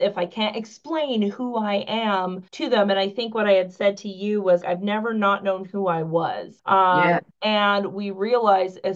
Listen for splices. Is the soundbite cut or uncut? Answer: cut